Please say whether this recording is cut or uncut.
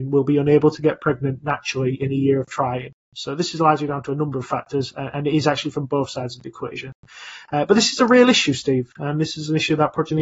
uncut